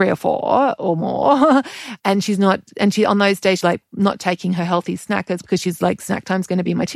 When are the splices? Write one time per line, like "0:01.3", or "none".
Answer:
0:03.6
0:05.4